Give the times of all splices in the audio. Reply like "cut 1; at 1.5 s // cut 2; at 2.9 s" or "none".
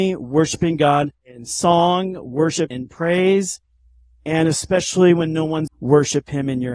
cut 1; at 1.2 s // cut 2; at 2.7 s // cut 3; at 5.7 s